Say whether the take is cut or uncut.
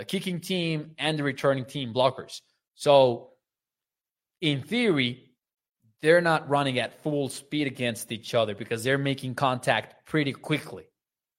uncut